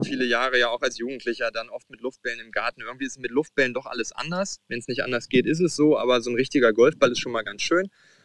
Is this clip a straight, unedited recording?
yes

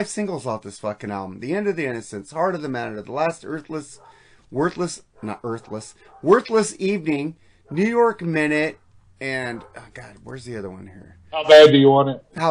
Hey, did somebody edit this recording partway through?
no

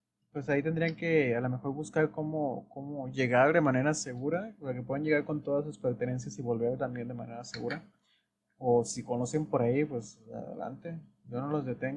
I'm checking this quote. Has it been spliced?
no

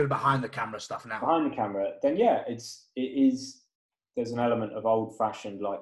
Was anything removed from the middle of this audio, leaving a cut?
no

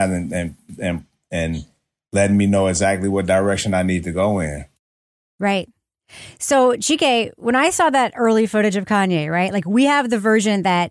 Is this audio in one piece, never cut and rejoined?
yes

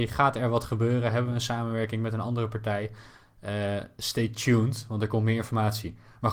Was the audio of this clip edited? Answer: no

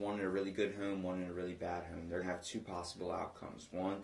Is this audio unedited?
no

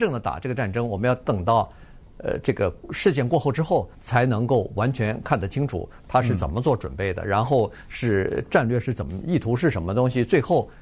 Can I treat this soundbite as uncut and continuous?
no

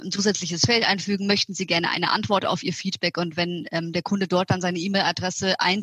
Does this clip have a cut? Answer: no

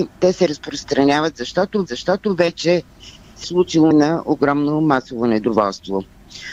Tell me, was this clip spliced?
yes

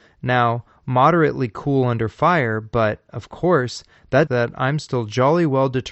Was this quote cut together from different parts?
yes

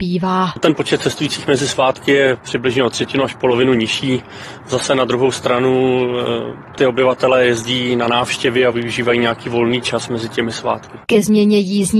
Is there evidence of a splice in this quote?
no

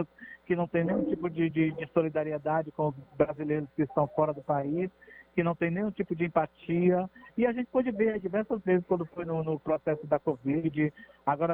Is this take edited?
no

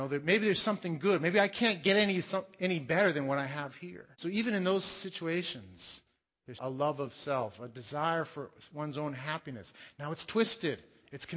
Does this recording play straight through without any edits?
no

